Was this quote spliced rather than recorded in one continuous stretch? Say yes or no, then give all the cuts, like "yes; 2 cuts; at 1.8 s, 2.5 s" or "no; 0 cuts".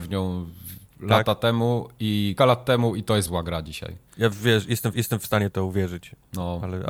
yes; 3 cuts; at 2.4 s, 3.3 s, 4.9 s